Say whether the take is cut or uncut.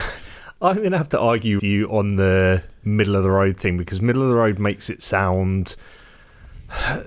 cut